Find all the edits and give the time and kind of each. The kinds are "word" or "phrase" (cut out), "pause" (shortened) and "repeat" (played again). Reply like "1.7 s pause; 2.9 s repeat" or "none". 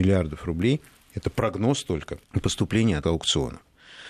2.2 s pause; 3.0 s word